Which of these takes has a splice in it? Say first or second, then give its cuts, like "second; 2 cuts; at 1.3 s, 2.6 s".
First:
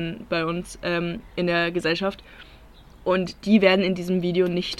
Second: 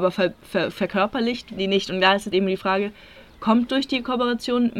second; 3 cuts; at 1.6 s, 2.3 s, 3.7 s